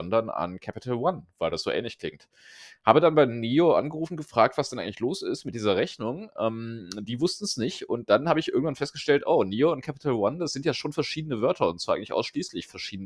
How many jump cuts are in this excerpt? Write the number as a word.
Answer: zero